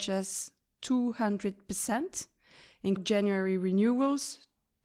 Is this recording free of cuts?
no; 1 cut; at 3.0 s

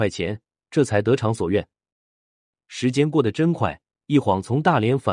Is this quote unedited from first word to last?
yes; 0 cuts

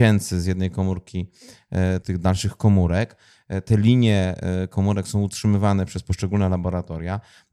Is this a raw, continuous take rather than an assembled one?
no; 1 cut; at 2.0 s

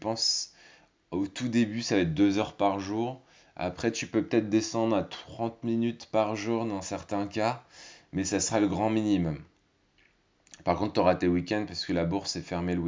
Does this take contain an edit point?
no; 0 cuts

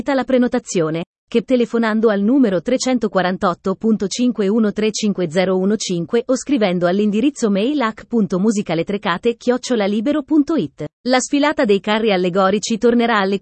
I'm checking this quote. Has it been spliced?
yes; 2 cuts; at 1.4 s, 10.9 s

